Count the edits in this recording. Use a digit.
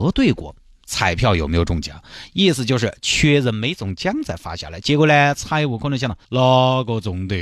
1